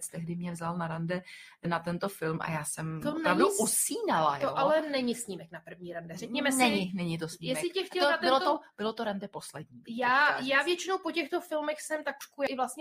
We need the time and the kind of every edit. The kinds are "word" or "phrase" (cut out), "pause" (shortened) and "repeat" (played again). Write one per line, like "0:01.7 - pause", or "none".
none

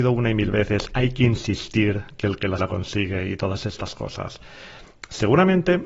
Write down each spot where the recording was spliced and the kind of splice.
0:00.9 - word
0:02.6 - word

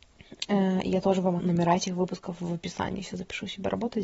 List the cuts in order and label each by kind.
0:01.4 - word

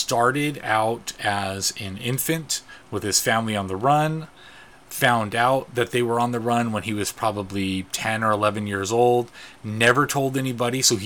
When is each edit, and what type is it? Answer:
none

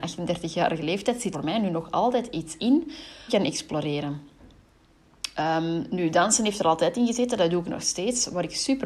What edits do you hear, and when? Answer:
0:01.3 - word
0:03.3 - phrase

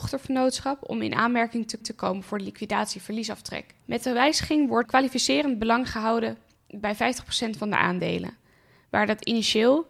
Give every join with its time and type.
0:01.8 - repeat
0:03.8 - pause
0:04.8 - word

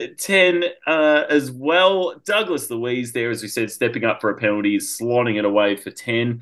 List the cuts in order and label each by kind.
none

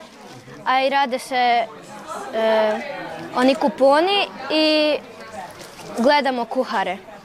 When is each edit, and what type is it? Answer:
none

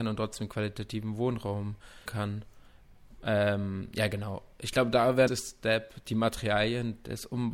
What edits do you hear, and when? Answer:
0:02.1 - word
0:05.3 - phrase

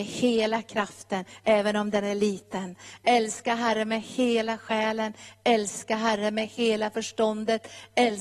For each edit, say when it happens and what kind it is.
none

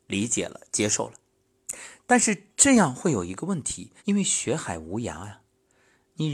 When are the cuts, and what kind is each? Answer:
0:04.0 - pause

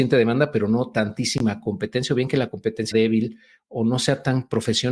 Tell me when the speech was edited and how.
0:02.9 - word

